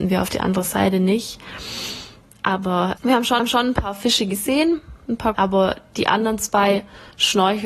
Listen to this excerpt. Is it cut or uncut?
cut